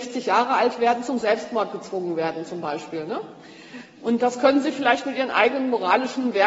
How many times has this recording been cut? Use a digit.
0